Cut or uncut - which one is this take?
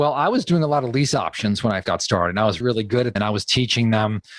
cut